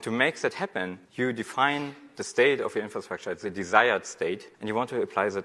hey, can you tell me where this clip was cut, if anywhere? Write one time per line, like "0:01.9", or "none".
0:01.0
0:04.5

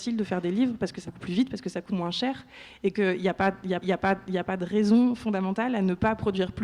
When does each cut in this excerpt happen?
0:01.0
0:01.9
0:02.9
0:03.8

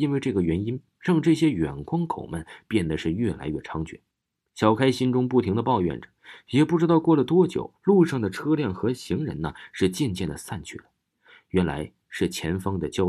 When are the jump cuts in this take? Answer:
0:04.1
0:07.8

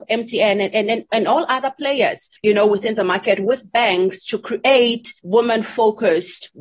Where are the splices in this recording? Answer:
none

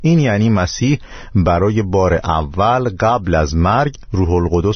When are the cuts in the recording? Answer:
none

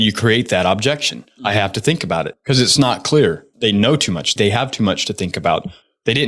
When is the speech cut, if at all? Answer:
none

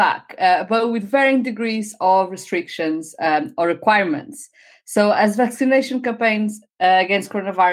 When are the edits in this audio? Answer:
none

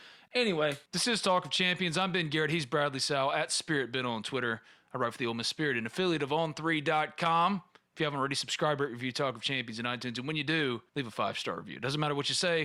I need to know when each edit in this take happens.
0:10.9

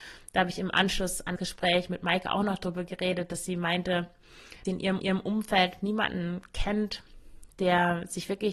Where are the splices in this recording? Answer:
0:01.4
0:04.7
0:05.0

